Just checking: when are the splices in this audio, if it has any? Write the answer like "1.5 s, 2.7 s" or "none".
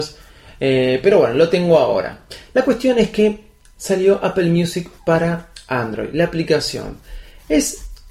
none